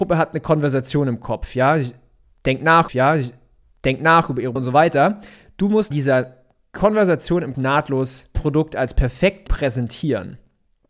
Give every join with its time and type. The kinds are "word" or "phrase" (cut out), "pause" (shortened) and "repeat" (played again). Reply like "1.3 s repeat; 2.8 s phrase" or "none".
2.9 s repeat; 4.6 s word; 5.9 s word; 7.5 s word; 8.3 s phrase; 9.5 s word